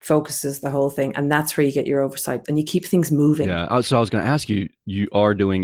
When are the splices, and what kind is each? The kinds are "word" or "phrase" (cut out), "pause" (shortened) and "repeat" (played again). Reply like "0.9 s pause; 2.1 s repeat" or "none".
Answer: 2.4 s word

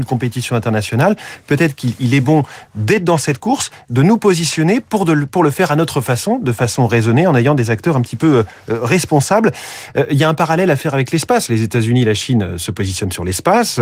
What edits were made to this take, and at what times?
none

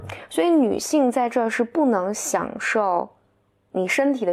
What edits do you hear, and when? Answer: none

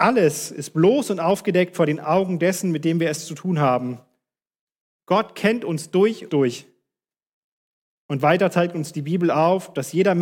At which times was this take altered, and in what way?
6.3 s word

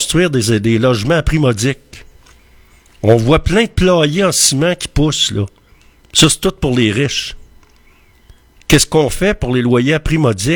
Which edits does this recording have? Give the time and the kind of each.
none

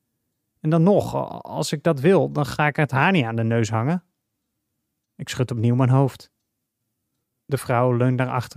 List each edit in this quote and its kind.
none

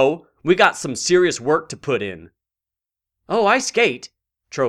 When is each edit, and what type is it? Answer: none

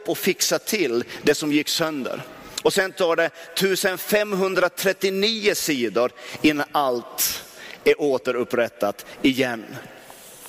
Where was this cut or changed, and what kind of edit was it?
none

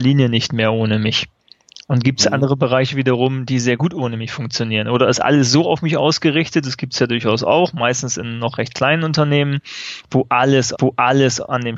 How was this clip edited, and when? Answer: 10.7 s repeat

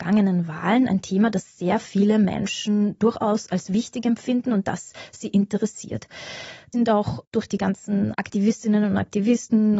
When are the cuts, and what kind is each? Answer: 6.7 s phrase

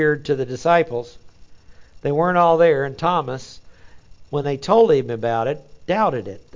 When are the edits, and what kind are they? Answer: none

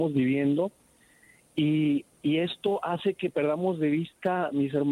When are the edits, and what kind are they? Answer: none

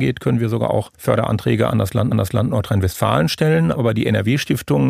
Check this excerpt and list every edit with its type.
0.9 s pause; 2.1 s repeat

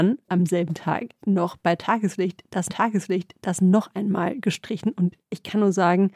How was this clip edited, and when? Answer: 2.7 s repeat; 5.2 s pause

